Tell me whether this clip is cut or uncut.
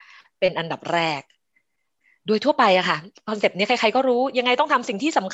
uncut